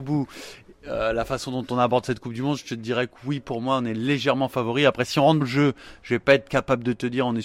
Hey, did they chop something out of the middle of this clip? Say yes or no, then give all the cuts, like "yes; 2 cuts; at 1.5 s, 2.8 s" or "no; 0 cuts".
yes; 1 cut; at 5.4 s